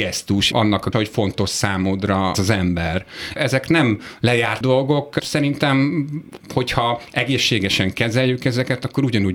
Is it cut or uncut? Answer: cut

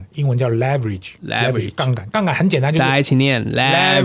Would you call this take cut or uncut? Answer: cut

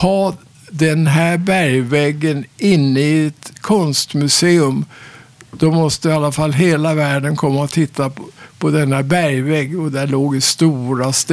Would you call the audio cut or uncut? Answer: uncut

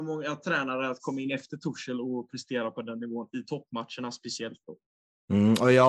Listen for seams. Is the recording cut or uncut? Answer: uncut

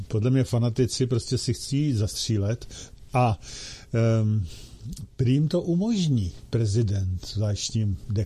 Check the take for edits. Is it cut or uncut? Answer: uncut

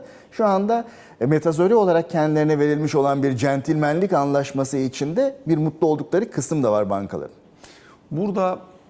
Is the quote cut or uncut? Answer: uncut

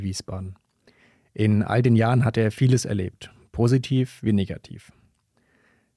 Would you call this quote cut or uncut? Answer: uncut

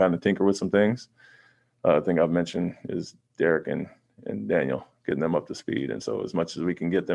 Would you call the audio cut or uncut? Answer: uncut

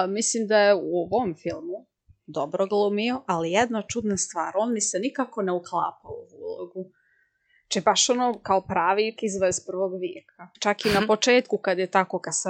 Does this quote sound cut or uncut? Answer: cut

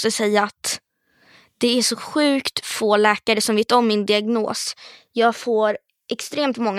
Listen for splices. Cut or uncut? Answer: uncut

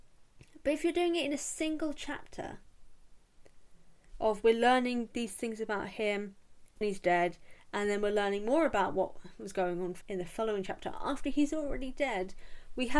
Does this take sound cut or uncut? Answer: cut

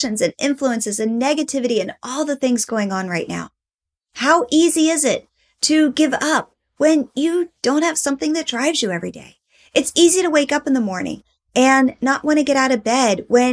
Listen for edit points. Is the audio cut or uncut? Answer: uncut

